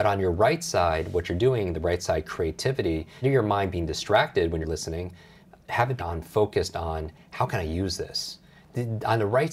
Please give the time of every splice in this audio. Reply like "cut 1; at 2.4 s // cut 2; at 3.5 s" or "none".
cut 1; at 3.2 s // cut 2; at 4.6 s // cut 3; at 6.0 s